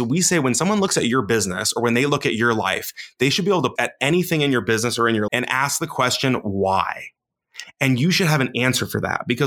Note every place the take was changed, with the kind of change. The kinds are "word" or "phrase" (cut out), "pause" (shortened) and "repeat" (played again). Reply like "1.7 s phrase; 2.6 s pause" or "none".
3.8 s word; 5.3 s word